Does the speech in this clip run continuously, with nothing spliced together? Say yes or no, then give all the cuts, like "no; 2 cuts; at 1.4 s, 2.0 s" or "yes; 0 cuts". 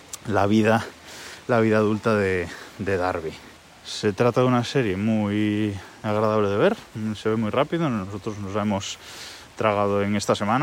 yes; 0 cuts